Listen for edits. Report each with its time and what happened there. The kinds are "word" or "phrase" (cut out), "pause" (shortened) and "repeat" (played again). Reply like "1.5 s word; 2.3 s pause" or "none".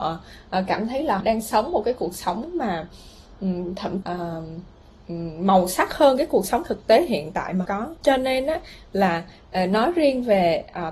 1.2 s word; 4.0 s phrase; 7.7 s word; 8.0 s pause